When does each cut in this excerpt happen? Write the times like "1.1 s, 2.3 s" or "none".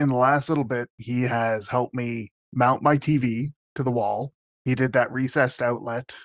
2.4 s, 4.5 s